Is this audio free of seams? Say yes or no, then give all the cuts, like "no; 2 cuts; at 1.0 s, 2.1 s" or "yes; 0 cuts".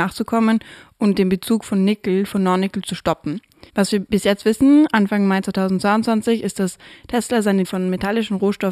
no; 2 cuts; at 3.7 s, 7.6 s